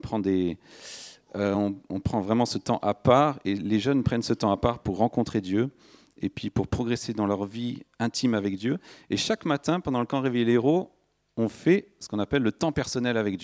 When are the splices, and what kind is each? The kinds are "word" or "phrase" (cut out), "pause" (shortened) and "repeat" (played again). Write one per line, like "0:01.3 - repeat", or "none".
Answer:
none